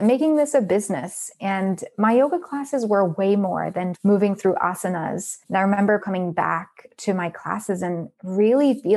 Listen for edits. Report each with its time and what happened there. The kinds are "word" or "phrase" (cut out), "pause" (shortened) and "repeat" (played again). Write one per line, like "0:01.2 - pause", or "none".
0:03.9 - word
0:05.4 - pause
0:06.0 - word